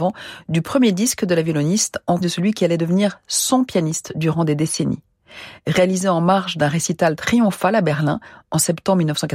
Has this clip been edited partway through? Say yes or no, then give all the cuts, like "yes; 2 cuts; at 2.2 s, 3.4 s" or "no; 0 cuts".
yes; 1 cut; at 2.2 s